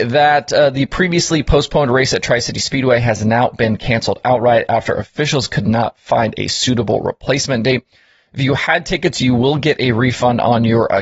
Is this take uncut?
yes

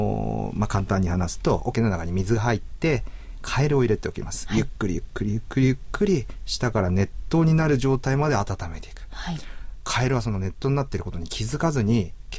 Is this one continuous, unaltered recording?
no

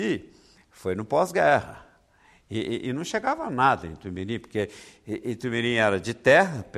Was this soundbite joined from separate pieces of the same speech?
no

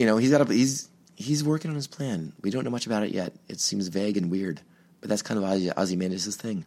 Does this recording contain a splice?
no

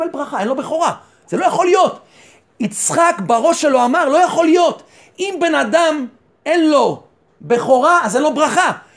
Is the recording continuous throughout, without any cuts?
yes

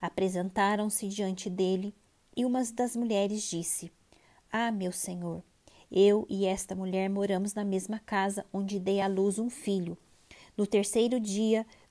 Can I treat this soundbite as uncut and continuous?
yes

